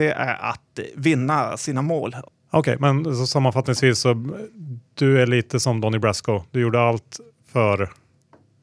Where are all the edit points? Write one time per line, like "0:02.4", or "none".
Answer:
none